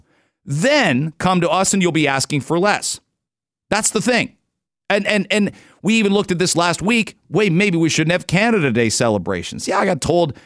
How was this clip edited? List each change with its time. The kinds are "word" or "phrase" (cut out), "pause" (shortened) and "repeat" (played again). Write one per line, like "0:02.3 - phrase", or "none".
none